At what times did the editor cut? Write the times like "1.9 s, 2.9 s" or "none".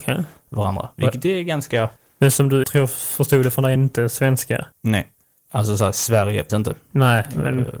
2.0 s, 2.6 s, 3.8 s, 4.7 s, 6.5 s